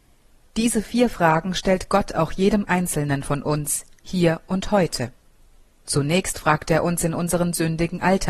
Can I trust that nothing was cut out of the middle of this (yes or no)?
yes